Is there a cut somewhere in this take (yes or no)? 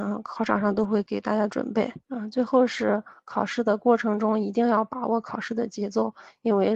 yes